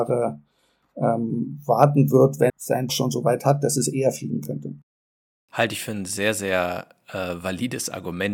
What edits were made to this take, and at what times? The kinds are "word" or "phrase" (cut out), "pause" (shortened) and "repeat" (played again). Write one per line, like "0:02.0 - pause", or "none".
0:02.5 - phrase
0:02.9 - phrase